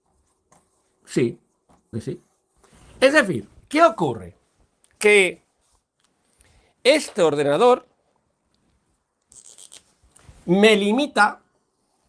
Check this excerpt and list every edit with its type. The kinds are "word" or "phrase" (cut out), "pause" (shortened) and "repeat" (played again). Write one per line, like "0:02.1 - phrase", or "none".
0:01.9 - word
0:03.6 - pause